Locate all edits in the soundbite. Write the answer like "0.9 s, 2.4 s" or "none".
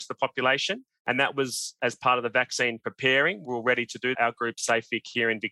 4.1 s